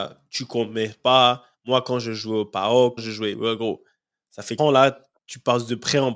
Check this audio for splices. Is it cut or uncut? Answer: cut